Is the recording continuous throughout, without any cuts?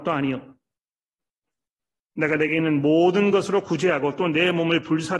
yes; 0 cuts

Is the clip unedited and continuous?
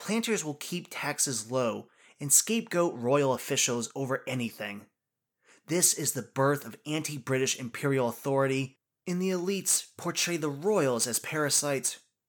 yes; 0 cuts

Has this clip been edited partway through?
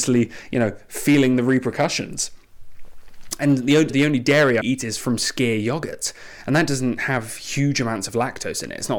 yes; 2 cuts; at 3.9 s, 4.6 s

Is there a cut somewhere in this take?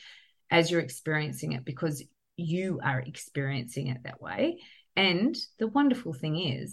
no; 0 cuts

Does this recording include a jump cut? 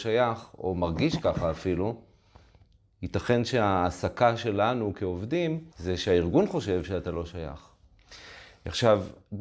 yes; 1 cut; at 5.7 s

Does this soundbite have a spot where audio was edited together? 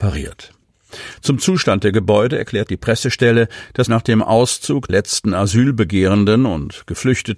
yes; 2 cuts; at 3.9 s, 4.9 s

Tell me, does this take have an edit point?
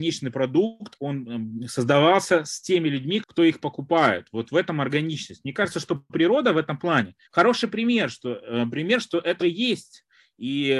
yes; 3 cuts; at 3.2 s, 7.3 s, 9.4 s

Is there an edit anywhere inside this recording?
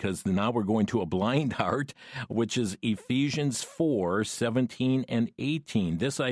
no; 0 cuts

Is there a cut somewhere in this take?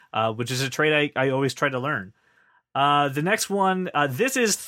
no; 0 cuts

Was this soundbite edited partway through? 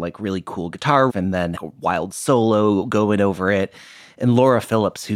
yes; 2 cuts; at 1.1 s, 1.6 s

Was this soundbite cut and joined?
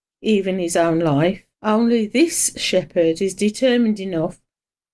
yes; 1 cut; at 1.5 s

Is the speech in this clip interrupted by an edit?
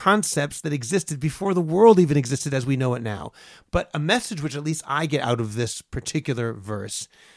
no; 0 cuts

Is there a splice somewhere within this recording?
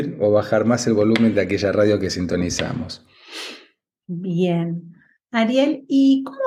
no; 0 cuts

